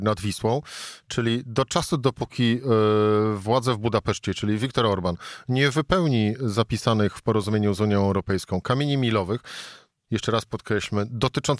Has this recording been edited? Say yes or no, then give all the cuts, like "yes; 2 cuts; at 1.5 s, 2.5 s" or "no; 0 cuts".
no; 0 cuts